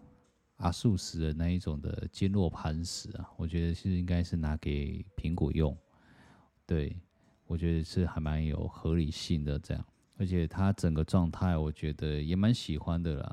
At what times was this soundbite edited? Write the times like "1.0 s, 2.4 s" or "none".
9.9 s